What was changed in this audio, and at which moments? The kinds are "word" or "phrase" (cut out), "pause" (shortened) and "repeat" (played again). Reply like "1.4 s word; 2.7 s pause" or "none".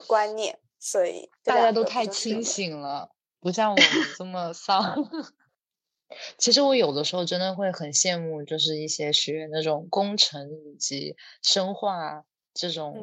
1.4 s pause